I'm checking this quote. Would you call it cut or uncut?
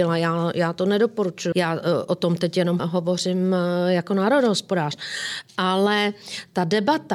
cut